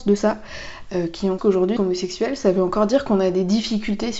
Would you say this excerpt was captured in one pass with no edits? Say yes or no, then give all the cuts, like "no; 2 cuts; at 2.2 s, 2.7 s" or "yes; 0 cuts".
no; 2 cuts; at 1.4 s, 1.8 s